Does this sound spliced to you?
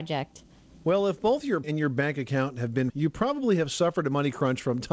yes; 2 cuts; at 1.6 s, 2.9 s

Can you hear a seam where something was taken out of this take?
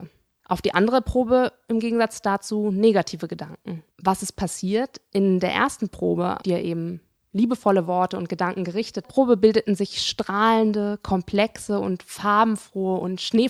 yes; 3 cuts; at 3.9 s, 6.4 s, 9.0 s

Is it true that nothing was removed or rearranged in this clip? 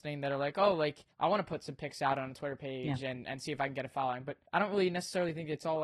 no; 2 cuts; at 1.1 s, 4.5 s

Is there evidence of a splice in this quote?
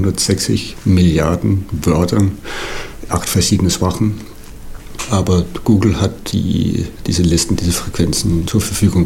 yes; 1 cut; at 3.1 s

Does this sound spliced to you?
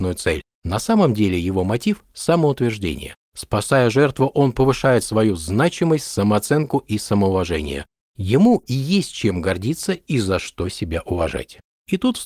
no; 0 cuts

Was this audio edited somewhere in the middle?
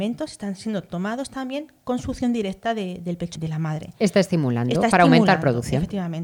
yes; 1 cut; at 3.4 s

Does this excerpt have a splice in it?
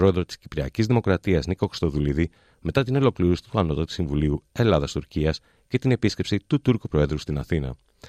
no; 0 cuts

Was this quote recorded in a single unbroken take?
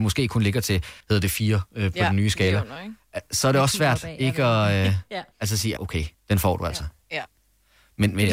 no; 4 cuts; at 1.0 s, 5.3 s, 5.8 s, 6.1 s

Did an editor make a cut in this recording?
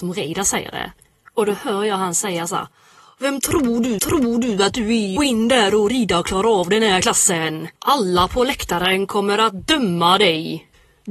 yes; 3 cuts; at 4.0 s, 5.2 s, 7.8 s

